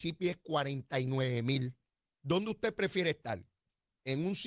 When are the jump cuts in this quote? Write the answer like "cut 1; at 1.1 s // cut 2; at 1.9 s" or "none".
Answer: none